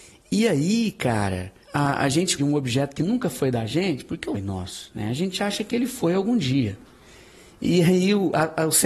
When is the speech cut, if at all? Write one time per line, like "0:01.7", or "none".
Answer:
0:01.6
0:02.4
0:04.3